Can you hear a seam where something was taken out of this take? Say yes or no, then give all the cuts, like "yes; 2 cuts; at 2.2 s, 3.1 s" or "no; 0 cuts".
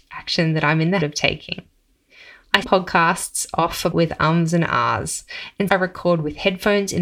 yes; 4 cuts; at 1.0 s, 2.6 s, 3.9 s, 5.7 s